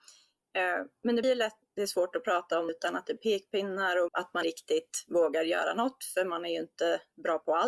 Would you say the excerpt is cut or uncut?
cut